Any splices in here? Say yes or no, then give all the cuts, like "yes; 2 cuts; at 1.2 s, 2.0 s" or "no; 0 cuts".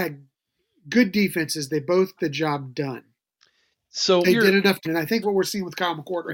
yes; 4 cuts; at 2.2 s, 4.2 s, 4.8 s, 5.2 s